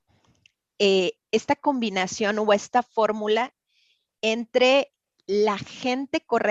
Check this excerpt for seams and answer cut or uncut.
uncut